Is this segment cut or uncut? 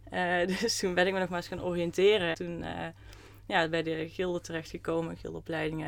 cut